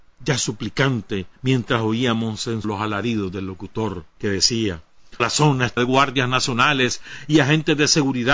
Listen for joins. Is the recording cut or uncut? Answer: cut